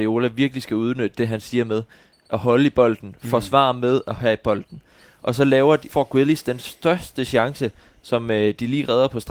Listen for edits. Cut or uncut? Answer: cut